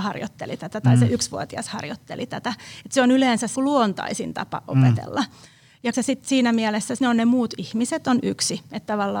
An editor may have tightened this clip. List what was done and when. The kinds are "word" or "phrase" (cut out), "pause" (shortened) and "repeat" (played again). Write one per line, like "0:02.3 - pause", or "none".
0:03.5 - word
0:05.9 - word
0:07.0 - word